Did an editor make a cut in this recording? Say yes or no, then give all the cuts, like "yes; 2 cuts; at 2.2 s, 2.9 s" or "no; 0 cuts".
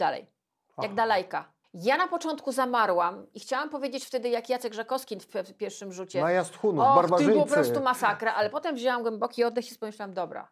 yes; 2 cuts; at 1.6 s, 5.3 s